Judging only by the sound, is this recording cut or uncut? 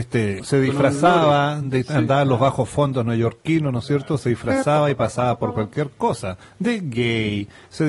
uncut